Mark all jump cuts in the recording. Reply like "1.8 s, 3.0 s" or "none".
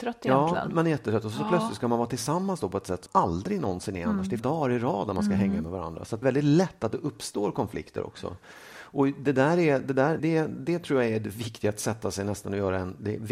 3.1 s, 4.4 s, 6.2 s, 10.2 s